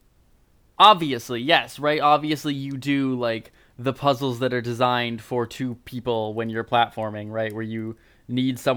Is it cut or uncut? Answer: uncut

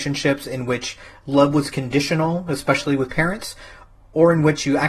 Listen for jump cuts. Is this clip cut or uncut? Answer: uncut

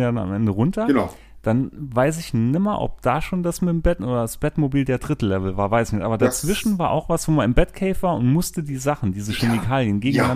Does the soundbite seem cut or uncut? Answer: uncut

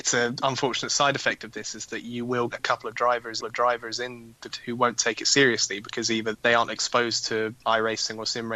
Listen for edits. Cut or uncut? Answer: cut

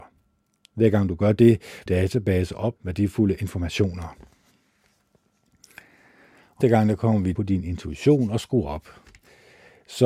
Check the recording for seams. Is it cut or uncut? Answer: cut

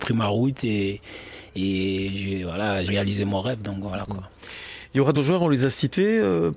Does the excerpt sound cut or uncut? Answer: cut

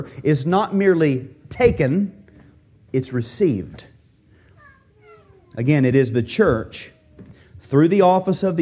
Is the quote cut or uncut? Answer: uncut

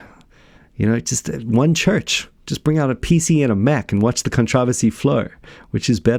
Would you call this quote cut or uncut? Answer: uncut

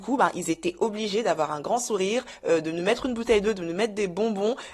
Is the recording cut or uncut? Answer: uncut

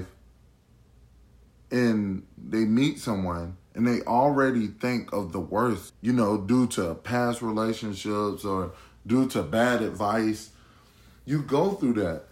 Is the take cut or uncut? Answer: cut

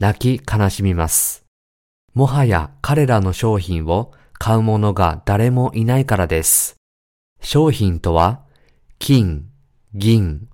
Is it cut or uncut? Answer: uncut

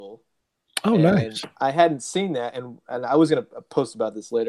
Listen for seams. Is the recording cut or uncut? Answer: uncut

